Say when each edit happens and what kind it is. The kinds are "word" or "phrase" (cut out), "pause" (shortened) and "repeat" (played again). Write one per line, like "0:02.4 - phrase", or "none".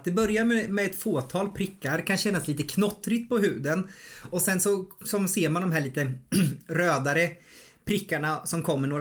none